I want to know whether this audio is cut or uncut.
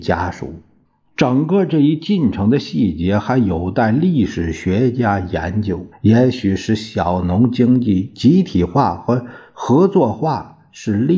cut